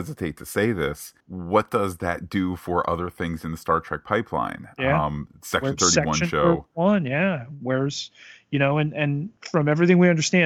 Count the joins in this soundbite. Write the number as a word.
two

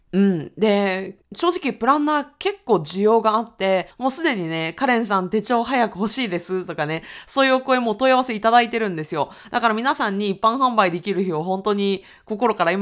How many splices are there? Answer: two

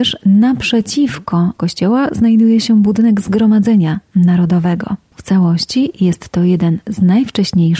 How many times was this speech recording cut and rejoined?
zero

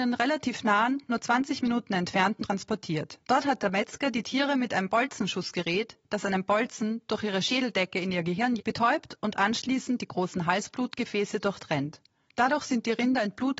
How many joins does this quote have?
three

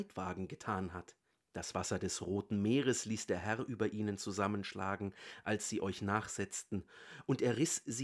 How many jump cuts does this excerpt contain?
one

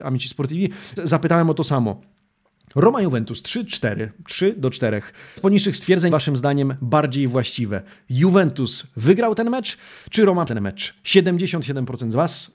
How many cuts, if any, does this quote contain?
four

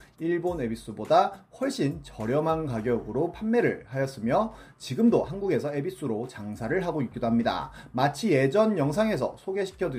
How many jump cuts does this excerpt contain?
zero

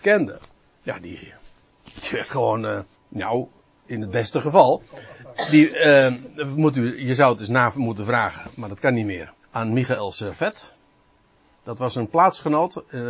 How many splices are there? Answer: two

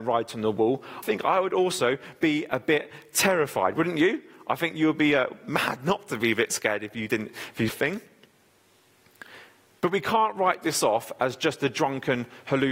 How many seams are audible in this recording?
two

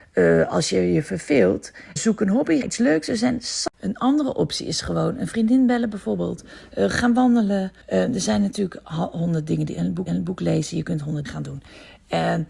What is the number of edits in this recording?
six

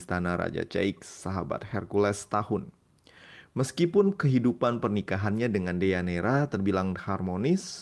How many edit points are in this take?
one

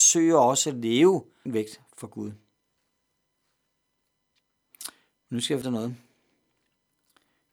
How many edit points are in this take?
two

